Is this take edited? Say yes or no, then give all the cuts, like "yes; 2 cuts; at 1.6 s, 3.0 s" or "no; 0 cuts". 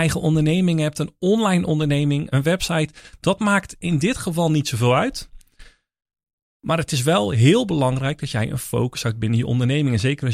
no; 0 cuts